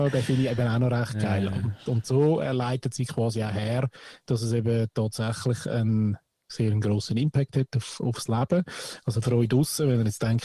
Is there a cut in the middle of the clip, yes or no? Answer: no